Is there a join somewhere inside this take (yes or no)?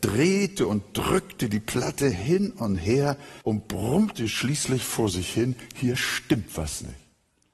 yes